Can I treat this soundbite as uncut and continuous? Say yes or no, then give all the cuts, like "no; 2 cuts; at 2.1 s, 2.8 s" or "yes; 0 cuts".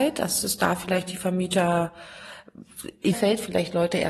no; 1 cut; at 3.1 s